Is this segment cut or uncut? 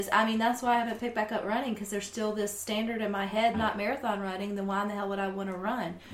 cut